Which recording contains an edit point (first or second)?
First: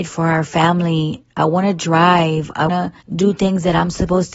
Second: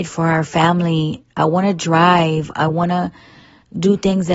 first